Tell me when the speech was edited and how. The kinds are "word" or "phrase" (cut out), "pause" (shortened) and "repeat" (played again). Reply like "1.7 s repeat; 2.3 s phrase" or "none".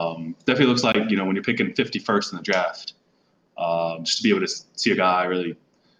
none

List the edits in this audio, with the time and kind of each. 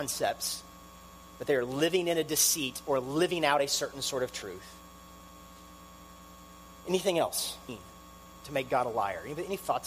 none

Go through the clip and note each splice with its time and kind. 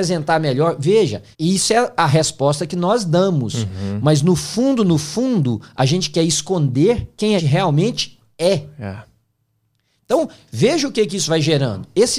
1.3 s pause; 7.4 s phrase

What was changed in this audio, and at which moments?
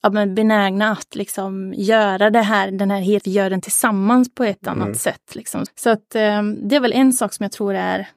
3.2 s phrase; 5.7 s word

